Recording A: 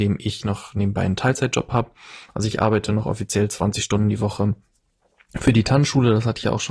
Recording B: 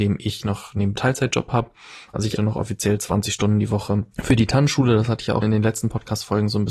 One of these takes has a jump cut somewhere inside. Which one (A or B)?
B